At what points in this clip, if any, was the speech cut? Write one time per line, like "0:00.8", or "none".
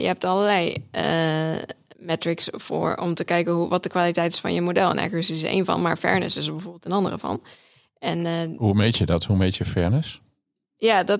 none